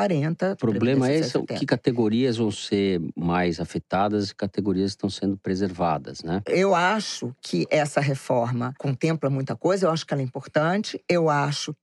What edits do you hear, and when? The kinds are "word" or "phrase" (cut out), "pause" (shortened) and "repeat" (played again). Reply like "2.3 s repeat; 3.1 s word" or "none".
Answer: none